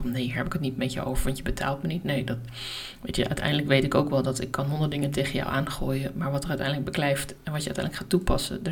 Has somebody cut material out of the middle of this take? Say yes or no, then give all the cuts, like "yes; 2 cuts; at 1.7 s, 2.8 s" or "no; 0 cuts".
no; 0 cuts